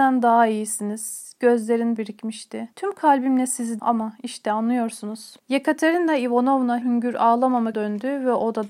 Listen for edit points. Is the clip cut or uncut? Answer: cut